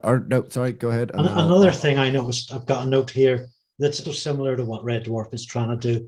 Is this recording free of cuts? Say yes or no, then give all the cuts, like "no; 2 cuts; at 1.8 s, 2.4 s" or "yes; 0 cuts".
no; 1 cut; at 4.0 s